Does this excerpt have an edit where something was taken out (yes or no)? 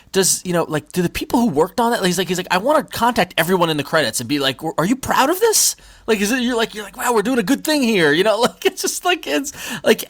no